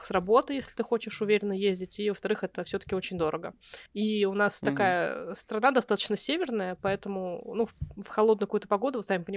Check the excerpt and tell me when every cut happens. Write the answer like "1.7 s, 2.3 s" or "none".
3.9 s